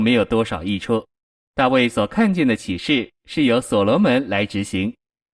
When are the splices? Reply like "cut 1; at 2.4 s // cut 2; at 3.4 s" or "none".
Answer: cut 1; at 1.2 s